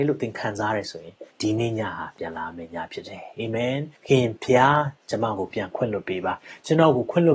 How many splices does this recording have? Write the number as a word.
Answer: two